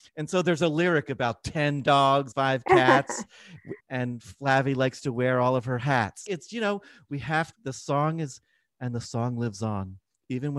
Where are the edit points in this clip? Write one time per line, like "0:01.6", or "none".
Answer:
0:02.3
0:03.8
0:06.3
0:07.5